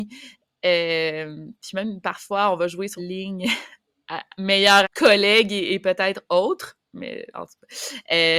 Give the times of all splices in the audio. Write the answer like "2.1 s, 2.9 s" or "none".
3.0 s, 4.8 s, 6.9 s